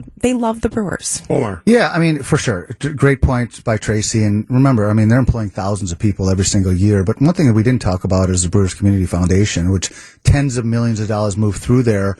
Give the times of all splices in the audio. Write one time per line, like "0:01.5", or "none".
none